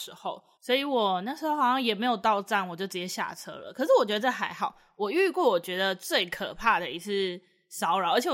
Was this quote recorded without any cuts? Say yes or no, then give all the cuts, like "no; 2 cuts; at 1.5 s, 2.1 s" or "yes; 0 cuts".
yes; 0 cuts